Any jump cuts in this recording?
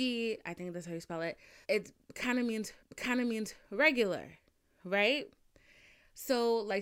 yes; 2 cuts; at 1.6 s, 2.8 s

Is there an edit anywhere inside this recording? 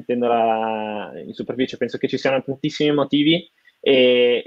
no; 0 cuts

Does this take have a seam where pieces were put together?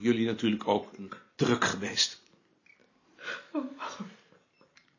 no; 0 cuts

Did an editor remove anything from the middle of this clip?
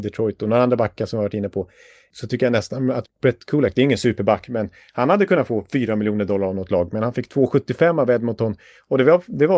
yes; 1 cut; at 3.0 s

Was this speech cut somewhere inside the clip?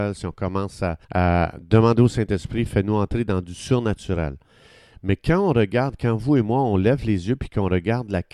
yes; 1 cut; at 1.0 s

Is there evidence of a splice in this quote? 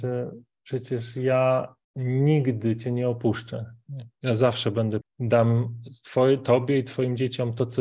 yes; 2 cuts; at 1.8 s, 5.0 s

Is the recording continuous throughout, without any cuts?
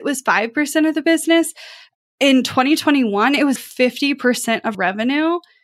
no; 2 cuts; at 3.6 s, 4.7 s

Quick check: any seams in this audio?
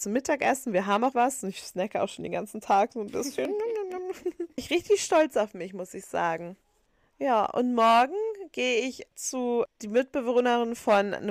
yes; 4 cuts; at 1.1 s, 4.6 s, 9.1 s, 9.7 s

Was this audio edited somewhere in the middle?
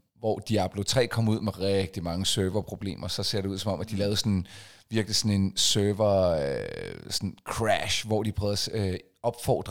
no; 0 cuts

